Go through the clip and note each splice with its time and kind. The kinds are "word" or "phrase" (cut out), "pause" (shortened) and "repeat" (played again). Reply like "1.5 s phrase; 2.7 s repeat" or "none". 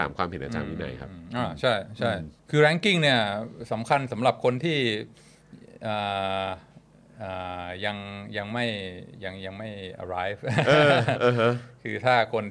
2.4 s pause